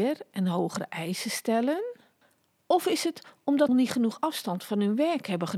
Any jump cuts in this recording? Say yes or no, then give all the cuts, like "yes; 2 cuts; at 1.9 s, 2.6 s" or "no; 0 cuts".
yes; 1 cut; at 3.7 s